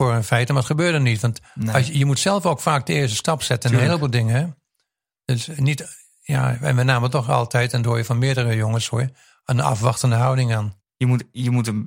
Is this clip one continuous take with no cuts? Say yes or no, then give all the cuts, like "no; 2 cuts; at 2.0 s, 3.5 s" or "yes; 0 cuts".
yes; 0 cuts